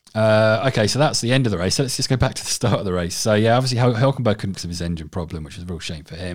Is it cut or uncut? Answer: cut